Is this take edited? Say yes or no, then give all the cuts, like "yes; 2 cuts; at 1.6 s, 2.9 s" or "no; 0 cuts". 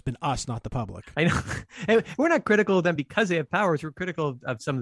no; 0 cuts